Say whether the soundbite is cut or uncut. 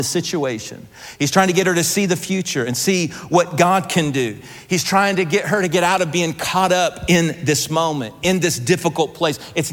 uncut